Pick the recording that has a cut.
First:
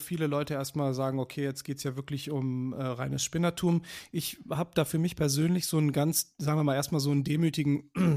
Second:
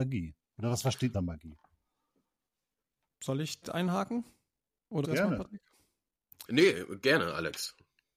second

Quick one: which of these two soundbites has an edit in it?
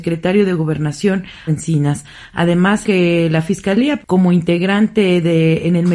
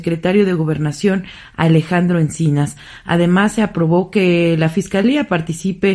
first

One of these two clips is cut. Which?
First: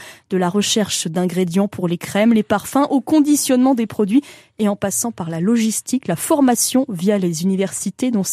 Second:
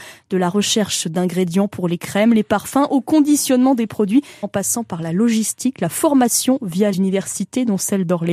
second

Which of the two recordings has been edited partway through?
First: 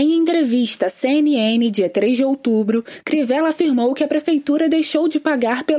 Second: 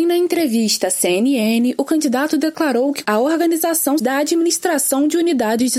second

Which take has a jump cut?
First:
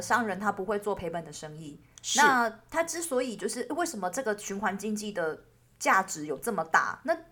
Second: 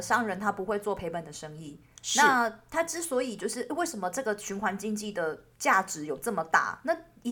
second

